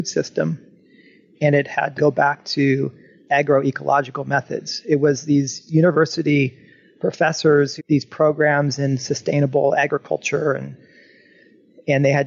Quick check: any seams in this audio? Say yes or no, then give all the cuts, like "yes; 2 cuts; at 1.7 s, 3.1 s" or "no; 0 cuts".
yes; 2 cuts; at 2.0 s, 7.8 s